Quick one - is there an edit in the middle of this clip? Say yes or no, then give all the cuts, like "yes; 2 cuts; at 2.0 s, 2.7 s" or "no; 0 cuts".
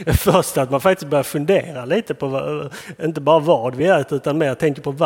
no; 0 cuts